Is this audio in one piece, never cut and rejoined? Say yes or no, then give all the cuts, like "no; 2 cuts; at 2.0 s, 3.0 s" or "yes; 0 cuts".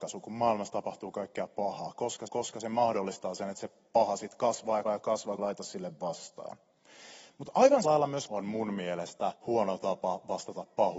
no; 6 cuts; at 2.3 s, 4.8 s, 5.4 s, 7.8 s, 8.3 s, 9.3 s